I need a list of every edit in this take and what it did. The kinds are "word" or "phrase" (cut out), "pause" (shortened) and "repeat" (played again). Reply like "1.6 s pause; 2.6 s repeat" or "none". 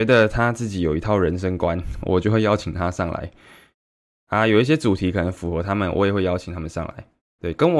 none